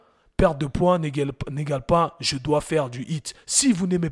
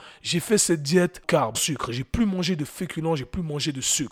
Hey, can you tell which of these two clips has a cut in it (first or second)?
second